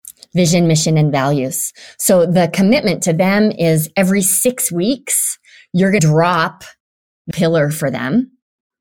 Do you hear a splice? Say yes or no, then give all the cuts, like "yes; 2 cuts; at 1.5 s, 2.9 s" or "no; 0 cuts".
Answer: yes; 2 cuts; at 6.0 s, 7.3 s